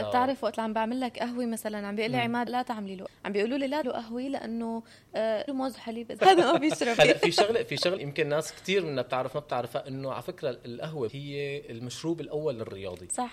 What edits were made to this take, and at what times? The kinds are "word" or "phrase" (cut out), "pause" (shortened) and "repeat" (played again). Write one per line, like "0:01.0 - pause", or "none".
0:02.5 - word
0:03.1 - word
0:03.8 - word
0:05.5 - word
0:06.2 - word
0:07.0 - word
0:08.0 - word
0:09.3 - word
0:11.1 - word

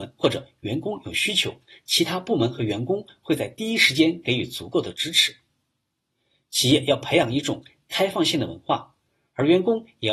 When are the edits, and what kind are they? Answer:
none

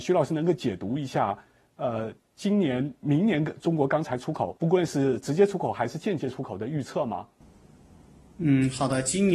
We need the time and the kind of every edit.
0:04.6 - pause

